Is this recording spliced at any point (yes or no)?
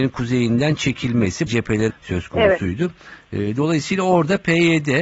yes